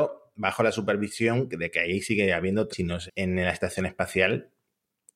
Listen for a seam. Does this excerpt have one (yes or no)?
yes